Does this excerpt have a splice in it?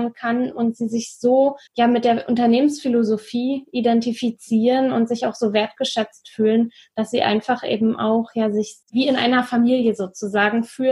yes; 2 cuts; at 1.7 s, 8.8 s

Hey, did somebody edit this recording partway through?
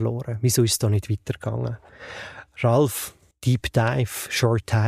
yes; 1 cut; at 3.3 s

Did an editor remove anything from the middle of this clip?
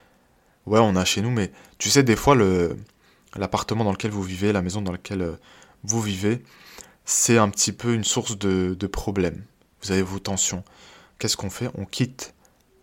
no; 0 cuts

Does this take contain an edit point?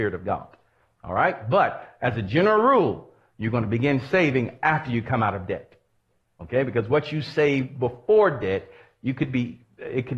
no; 0 cuts

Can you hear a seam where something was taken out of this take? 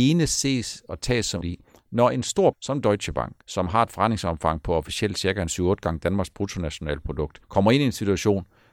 yes; 4 cuts; at 1.4 s, 2.5 s, 3.4 s, 7.4 s

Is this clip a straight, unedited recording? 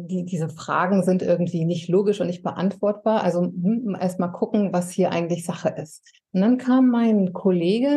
no; 1 cut; at 6.2 s

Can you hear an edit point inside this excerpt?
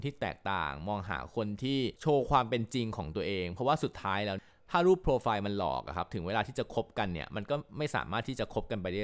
no; 0 cuts

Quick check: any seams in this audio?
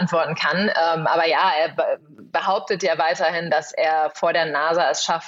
no; 0 cuts

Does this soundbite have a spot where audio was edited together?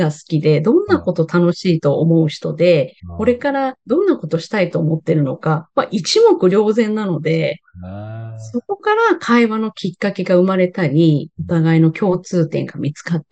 yes; 1 cut; at 3.0 s

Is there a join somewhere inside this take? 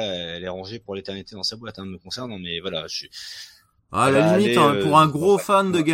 no; 0 cuts

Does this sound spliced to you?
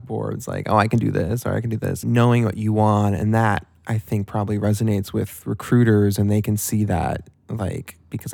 yes; 1 cut; at 2.0 s

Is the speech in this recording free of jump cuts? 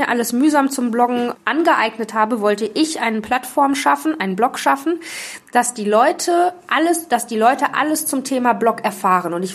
no; 1 cut; at 1.3 s

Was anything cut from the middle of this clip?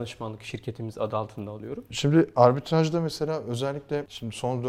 no; 0 cuts

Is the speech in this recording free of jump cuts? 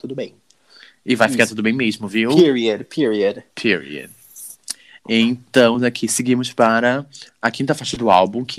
yes; 0 cuts

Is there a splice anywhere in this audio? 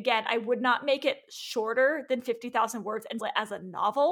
yes; 1 cut; at 3.2 s

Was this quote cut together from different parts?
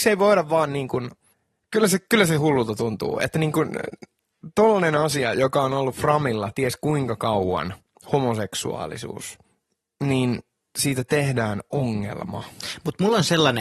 no; 0 cuts

